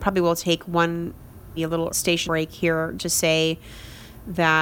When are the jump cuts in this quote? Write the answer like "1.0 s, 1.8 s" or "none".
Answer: 1.6 s, 1.9 s, 2.3 s, 3.0 s